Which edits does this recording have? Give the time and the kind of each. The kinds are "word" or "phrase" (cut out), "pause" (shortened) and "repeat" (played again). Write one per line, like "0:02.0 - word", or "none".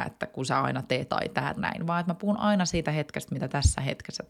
0:01.1 - word
0:01.6 - word